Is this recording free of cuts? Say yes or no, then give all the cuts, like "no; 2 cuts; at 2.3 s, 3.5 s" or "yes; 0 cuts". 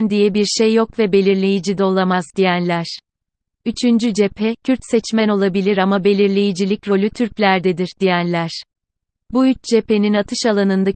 yes; 0 cuts